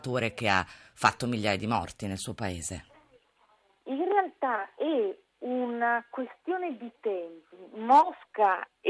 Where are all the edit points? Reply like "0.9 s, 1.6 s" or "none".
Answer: none